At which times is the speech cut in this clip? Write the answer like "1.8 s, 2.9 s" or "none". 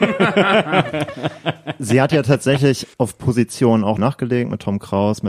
2.9 s, 4.0 s